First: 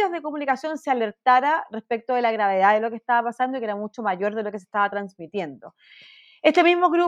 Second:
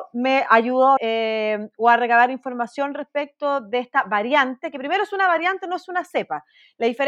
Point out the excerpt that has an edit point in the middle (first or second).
second